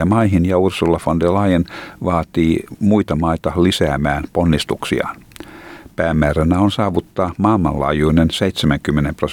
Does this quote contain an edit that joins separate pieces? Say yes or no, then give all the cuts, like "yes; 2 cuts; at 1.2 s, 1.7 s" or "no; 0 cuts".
no; 0 cuts